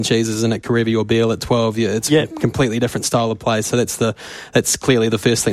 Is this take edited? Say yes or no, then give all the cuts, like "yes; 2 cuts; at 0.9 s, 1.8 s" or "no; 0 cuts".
no; 0 cuts